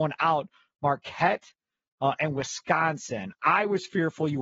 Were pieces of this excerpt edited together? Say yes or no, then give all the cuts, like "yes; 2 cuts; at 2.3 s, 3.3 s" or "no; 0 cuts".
no; 0 cuts